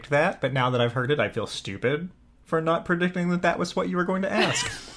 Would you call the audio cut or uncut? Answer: uncut